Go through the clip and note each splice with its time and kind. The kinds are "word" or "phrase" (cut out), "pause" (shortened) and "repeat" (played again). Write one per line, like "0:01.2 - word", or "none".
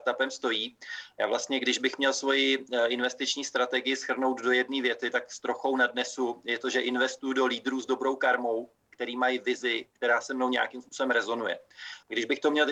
none